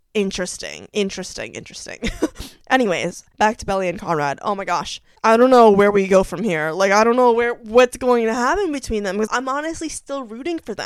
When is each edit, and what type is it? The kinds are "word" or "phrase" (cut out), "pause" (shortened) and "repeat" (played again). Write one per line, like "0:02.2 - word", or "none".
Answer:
0:09.3 - word